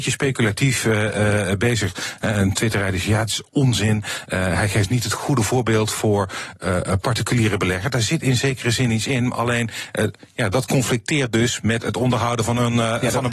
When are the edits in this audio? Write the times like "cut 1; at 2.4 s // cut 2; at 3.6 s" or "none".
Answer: none